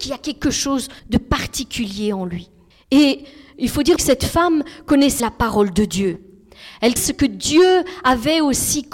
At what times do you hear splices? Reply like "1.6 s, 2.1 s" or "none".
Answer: 1.0 s, 2.7 s, 4.0 s, 5.2 s, 7.0 s

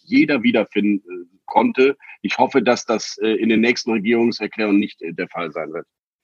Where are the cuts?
none

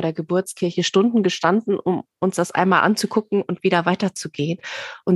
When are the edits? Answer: none

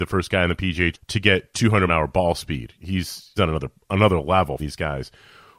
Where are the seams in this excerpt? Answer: 0.9 s, 1.9 s, 3.4 s, 4.6 s

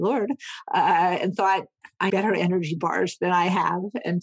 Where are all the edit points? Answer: 2.1 s

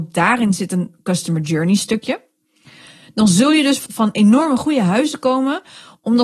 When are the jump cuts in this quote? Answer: 3.9 s

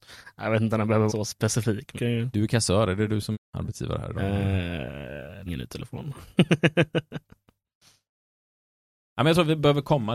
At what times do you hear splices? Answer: 1.1 s, 2.0 s, 3.3 s, 5.5 s

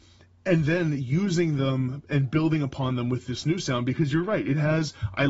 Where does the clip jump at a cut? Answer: none

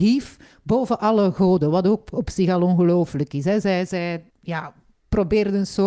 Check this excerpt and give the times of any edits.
4.3 s

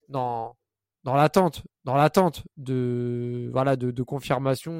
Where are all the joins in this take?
1.7 s

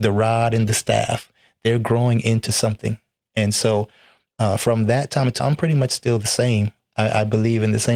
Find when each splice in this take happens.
5.4 s

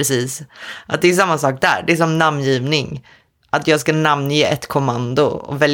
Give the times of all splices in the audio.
none

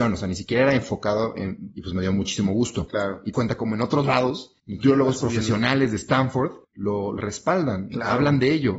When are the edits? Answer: 1.7 s, 3.3 s, 4.6 s, 6.6 s, 7.2 s

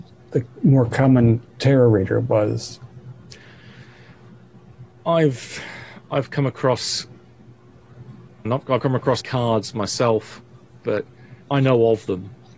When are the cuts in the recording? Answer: 1.5 s, 8.4 s, 8.8 s, 9.2 s, 11.4 s

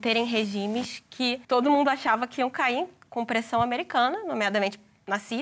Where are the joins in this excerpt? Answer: 1.4 s

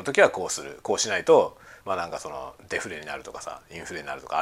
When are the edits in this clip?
1.8 s

